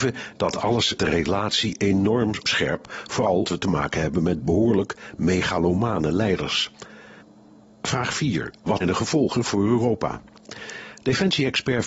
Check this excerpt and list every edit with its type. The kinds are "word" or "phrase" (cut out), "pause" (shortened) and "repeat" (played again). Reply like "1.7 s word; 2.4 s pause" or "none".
1.0 s word; 2.4 s word; 3.4 s word; 4.4 s word; 8.8 s word; 9.4 s word